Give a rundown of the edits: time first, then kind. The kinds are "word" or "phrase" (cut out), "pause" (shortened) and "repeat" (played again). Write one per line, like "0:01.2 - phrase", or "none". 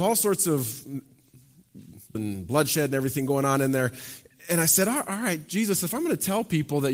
0:02.1 - word